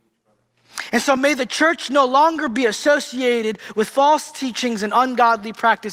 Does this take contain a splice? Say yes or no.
no